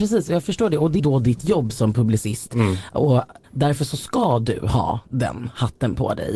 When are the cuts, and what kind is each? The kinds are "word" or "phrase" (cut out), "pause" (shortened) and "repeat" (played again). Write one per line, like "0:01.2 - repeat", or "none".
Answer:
0:01.0 - phrase
0:03.4 - word